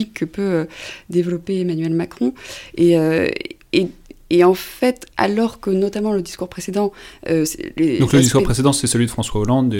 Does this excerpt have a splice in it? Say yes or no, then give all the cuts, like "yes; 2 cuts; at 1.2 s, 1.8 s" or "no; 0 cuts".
no; 0 cuts